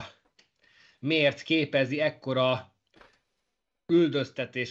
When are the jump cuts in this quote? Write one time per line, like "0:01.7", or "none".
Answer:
none